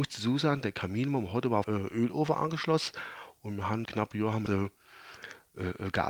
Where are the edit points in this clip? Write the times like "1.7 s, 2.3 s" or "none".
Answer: 1.6 s, 3.8 s, 4.5 s